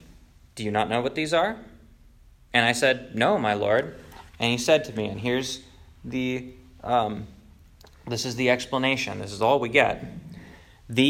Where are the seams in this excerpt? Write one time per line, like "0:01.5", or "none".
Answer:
none